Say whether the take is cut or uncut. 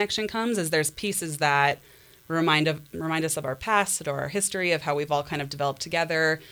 uncut